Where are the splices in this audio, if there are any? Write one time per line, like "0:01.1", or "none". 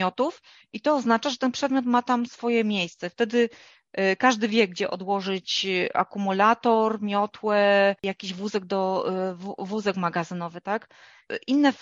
0:08.0

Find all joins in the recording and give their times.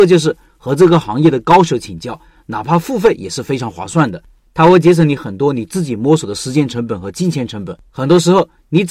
0:07.9

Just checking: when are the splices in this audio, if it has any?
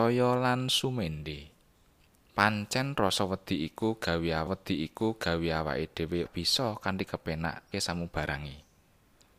0:01.7
0:04.5
0:06.2
0:07.7

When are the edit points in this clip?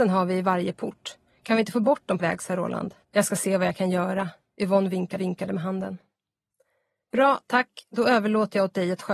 0:02.2
0:03.0
0:05.2

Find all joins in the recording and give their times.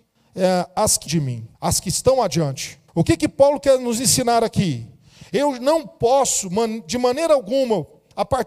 0:01.1
0:01.5
0:02.9

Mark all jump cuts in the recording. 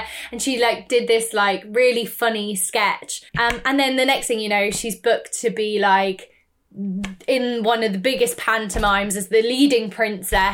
0:03.3

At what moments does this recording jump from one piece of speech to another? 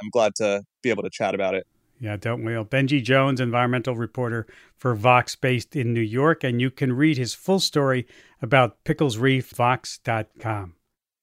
0:09.5

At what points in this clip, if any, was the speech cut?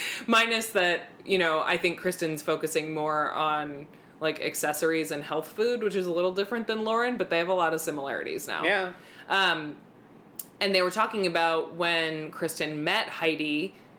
none

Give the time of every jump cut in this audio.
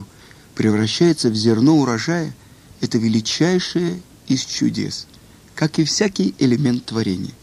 none

